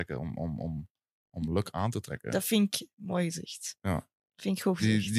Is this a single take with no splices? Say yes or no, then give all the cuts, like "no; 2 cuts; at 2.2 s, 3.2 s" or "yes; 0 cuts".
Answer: yes; 0 cuts